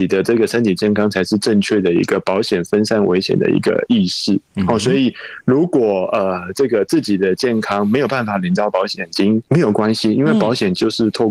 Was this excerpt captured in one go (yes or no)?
no